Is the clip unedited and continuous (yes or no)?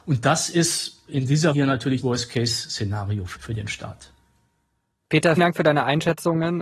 no